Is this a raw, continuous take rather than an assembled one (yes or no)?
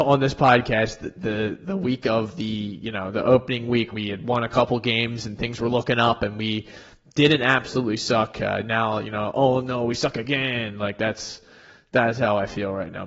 no